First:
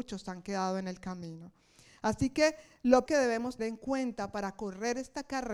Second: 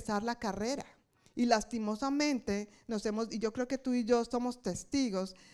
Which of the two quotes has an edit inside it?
first; 2 cuts; at 3.1 s, 3.6 s

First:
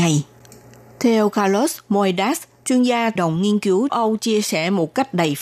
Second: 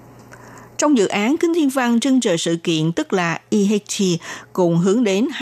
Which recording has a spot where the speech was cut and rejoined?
first; 2 cuts; at 3.2 s, 3.9 s

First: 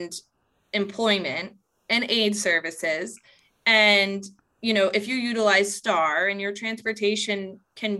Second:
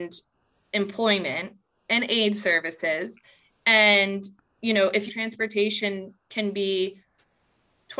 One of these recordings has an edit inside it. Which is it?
second; 1 cut; at 5.1 s

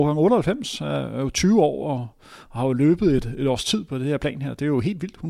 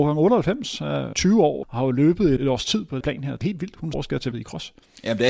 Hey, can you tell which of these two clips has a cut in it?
second; 7 cuts; at 1.1 s, 1.6 s, 2.4 s, 3.0 s, 3.4 s, 3.9 s, 4.3 s

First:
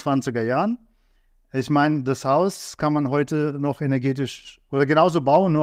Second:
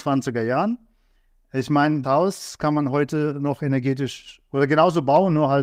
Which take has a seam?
second; 1 cut; at 2.0 s

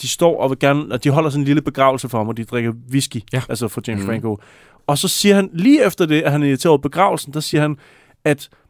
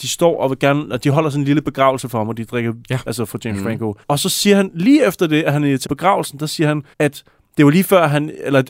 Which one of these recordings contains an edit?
second; 4 cuts; at 2.8 s, 4.0 s, 5.8 s, 6.9 s

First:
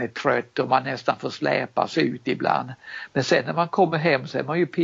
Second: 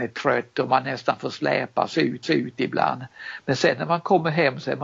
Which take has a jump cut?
second; 1 cut; at 2.2 s

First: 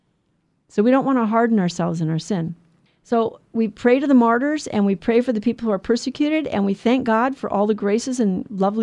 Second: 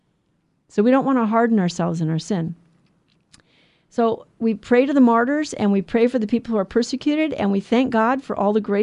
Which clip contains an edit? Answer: first; 1 cut; at 2.9 s

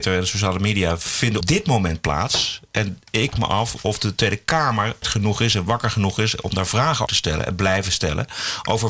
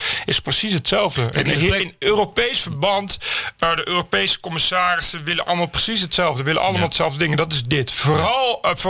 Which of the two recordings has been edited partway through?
first; 4 cuts; at 1.4 s, 3.3 s, 5.0 s, 7.1 s

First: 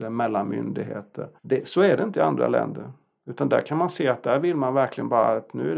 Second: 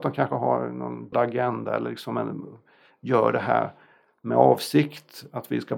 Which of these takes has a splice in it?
second; 1 cut; at 1.1 s

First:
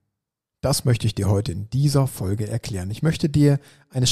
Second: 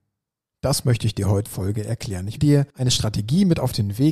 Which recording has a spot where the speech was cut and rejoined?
second; 3 cuts; at 1.5 s, 2.4 s, 2.7 s

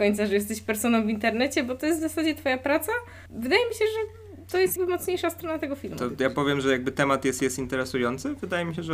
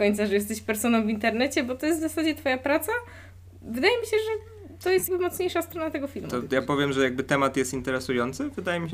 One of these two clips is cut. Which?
first; 2 cuts; at 3.3 s, 7.4 s

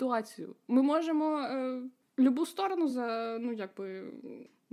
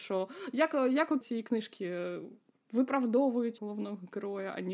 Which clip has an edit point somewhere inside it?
second; 2 cuts; at 1.2 s, 3.6 s

